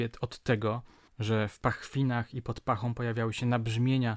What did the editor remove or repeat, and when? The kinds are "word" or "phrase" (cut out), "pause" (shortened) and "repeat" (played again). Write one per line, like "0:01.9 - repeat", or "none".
none